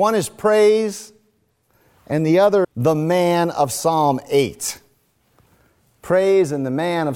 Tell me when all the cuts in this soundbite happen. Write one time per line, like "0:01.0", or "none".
0:02.6